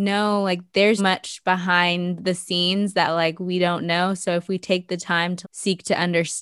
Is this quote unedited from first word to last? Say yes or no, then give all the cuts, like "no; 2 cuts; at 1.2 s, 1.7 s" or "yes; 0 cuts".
no; 2 cuts; at 1.0 s, 5.4 s